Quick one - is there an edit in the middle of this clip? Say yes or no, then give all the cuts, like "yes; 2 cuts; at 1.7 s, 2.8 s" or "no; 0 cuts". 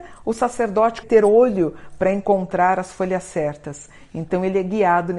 yes; 1 cut; at 1.0 s